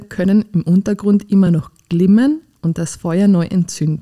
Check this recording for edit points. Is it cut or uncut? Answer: uncut